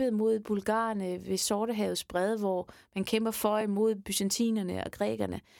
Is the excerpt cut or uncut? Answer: uncut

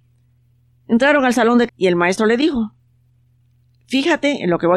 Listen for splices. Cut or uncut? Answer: cut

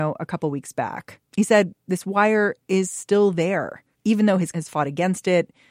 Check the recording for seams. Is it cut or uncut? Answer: cut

